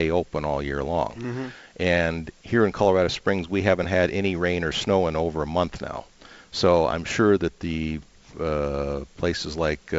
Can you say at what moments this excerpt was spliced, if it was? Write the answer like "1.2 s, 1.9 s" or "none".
none

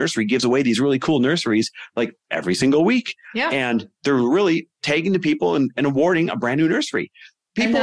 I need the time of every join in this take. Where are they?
none

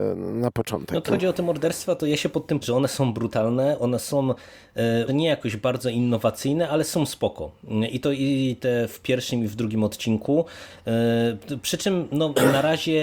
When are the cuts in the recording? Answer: 1.1 s, 2.6 s, 5.1 s

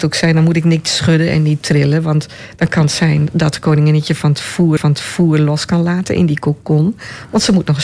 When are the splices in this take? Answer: 4.8 s

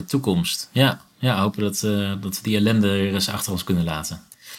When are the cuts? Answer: none

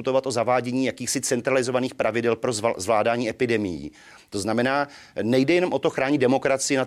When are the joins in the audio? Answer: none

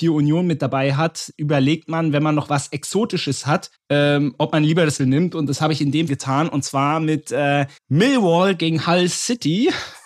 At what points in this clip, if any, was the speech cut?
3.7 s, 5.0 s, 6.1 s, 7.8 s

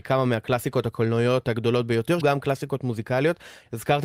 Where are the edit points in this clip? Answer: 2.2 s

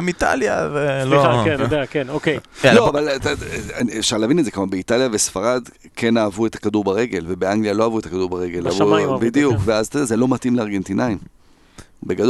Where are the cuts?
1.6 s

